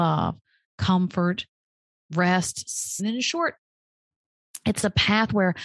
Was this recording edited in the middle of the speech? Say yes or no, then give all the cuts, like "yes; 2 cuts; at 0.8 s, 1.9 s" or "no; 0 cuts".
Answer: yes; 1 cut; at 3.0 s